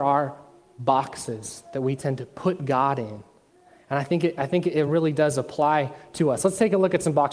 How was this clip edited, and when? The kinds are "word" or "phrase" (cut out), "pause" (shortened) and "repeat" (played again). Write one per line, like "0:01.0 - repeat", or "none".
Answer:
none